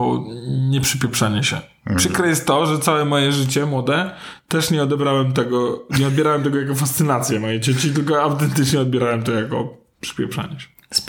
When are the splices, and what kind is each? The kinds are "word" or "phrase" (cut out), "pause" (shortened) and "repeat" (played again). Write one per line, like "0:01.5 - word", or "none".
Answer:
none